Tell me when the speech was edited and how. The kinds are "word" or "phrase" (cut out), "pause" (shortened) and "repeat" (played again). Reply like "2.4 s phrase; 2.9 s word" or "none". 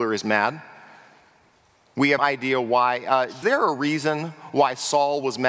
2.2 s word; 3.4 s word